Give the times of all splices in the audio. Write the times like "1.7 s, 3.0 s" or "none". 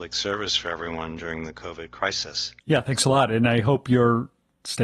2.6 s